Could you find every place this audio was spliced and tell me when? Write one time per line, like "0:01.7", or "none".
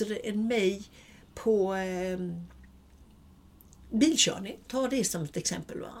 none

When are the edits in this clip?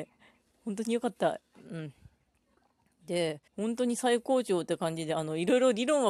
0:03.5

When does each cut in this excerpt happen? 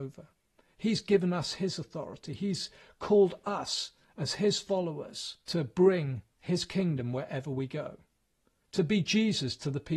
0:05.4
0:06.3

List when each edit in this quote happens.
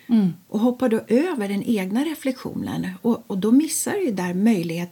none

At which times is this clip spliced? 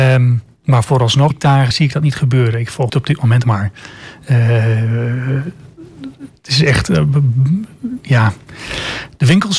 0:01.3
0:01.7
0:02.9
0:03.4

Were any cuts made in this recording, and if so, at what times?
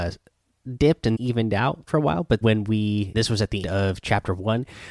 0:01.1
0:01.9
0:02.4
0:03.1
0:03.6

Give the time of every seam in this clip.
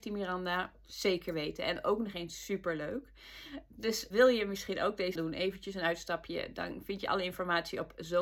0:04.1
0:05.2

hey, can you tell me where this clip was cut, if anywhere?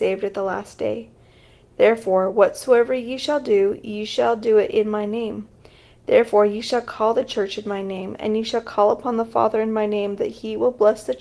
none

